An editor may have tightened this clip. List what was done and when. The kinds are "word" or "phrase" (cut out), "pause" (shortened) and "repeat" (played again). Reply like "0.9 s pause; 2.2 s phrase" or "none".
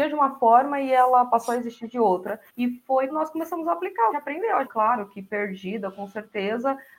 2.5 s pause; 3.1 s word; 4.1 s phrase; 4.6 s phrase

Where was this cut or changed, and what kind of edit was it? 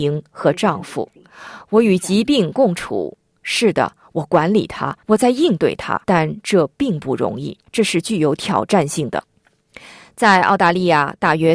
5.0 s pause; 6.0 s pause; 7.7 s pause

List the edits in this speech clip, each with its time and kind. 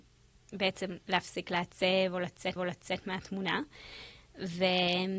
2.6 s repeat

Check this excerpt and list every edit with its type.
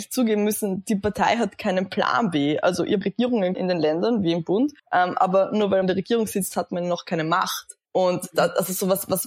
3.0 s phrase; 3.5 s word; 4.8 s pause; 5.8 s word; 7.8 s pause

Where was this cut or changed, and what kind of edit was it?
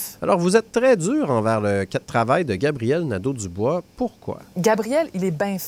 none

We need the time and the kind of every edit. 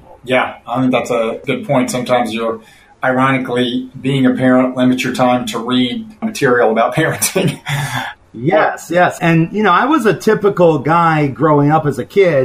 none

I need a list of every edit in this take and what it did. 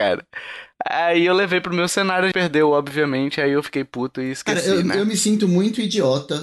2.3 s word

